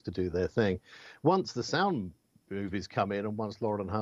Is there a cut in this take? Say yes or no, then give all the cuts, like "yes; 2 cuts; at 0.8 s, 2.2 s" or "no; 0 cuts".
no; 0 cuts